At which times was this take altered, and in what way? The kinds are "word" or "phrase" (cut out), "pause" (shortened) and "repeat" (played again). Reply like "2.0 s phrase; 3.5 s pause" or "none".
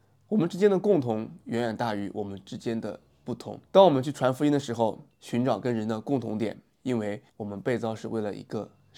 3.7 s pause; 5.1 s pause; 7.3 s pause